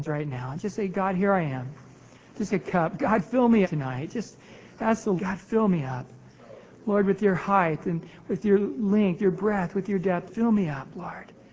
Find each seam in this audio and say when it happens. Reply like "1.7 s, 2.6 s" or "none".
2.5 s, 3.6 s, 5.2 s, 9.2 s, 10.3 s